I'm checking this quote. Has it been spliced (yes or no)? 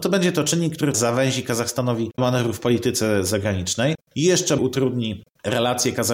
yes